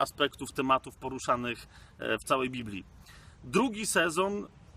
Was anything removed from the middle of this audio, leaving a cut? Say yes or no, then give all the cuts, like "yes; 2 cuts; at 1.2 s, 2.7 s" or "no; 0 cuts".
no; 0 cuts